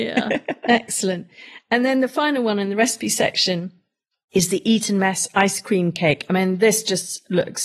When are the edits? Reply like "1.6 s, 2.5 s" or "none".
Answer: none